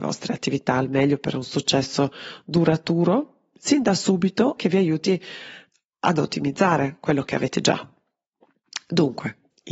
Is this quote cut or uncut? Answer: cut